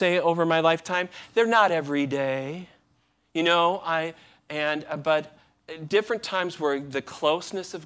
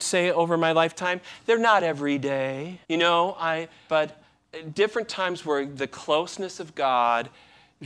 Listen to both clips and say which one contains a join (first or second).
second